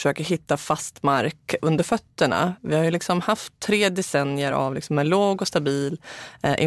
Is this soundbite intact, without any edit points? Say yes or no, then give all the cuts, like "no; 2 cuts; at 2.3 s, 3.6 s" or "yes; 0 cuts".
yes; 0 cuts